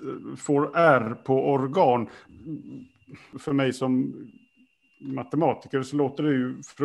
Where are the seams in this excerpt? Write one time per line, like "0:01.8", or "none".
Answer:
none